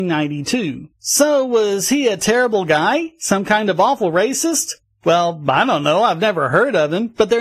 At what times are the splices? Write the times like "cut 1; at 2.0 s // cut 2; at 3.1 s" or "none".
cut 1; at 0.9 s